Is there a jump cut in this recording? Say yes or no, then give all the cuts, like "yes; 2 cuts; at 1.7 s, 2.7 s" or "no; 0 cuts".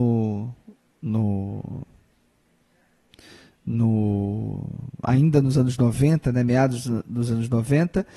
no; 0 cuts